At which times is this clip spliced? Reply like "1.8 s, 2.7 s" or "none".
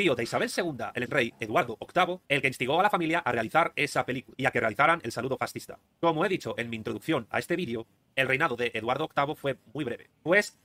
1.1 s, 2.2 s